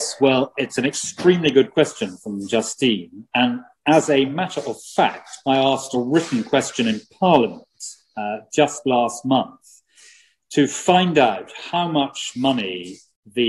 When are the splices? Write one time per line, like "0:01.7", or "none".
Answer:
none